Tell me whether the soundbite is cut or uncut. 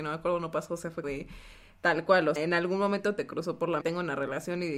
cut